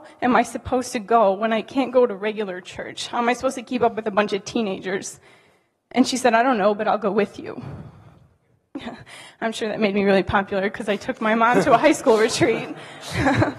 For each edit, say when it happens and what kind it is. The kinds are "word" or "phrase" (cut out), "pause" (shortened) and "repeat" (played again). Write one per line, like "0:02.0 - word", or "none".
none

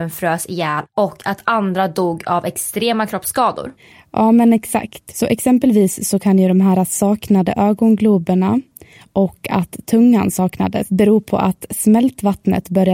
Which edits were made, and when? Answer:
none

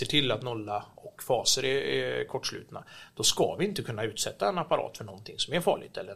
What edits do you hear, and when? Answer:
none

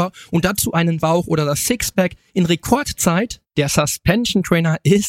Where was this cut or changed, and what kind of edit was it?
0:01.0 - word
0:03.5 - pause

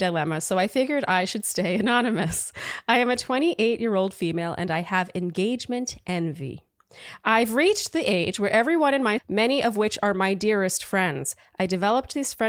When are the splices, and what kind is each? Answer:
0:09.2 - phrase

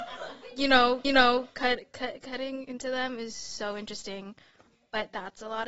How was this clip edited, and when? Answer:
0:01.0 - repeat

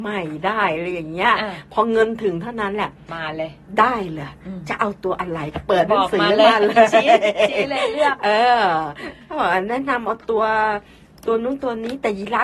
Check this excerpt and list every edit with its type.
none

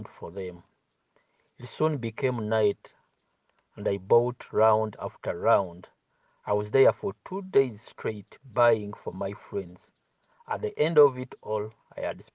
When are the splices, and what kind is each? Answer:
none

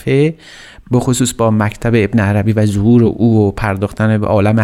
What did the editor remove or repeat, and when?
none

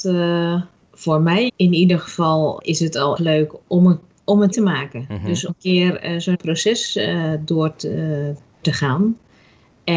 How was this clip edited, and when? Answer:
0:01.5 - word
0:02.6 - word
0:03.2 - word
0:03.6 - word
0:04.5 - word
0:05.5 - word
0:06.3 - word
0:08.6 - word

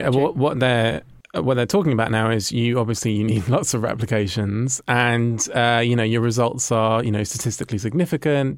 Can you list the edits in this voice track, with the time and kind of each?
none

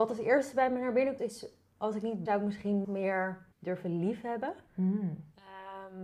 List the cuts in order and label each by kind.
0:01.2 - word
0:02.3 - phrase
0:02.8 - word
0:03.5 - pause
0:04.7 - pause

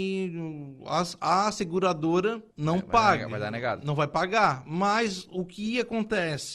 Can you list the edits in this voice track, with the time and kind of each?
0:02.5 - pause

